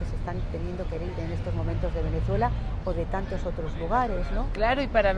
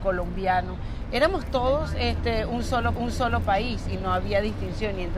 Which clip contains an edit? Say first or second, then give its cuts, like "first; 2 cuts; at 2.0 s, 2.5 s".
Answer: second; 1 cut; at 3.0 s